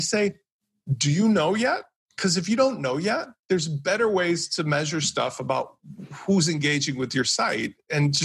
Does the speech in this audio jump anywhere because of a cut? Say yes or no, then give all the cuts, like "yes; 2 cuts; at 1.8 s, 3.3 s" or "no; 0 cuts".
no; 0 cuts